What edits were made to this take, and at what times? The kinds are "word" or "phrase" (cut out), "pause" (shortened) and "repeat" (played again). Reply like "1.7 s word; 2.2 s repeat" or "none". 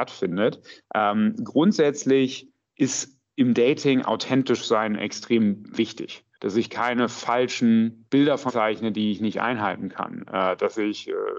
6.3 s pause; 8.1 s pause; 8.5 s word